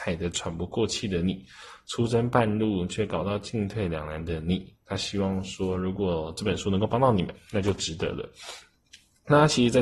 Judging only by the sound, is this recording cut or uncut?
uncut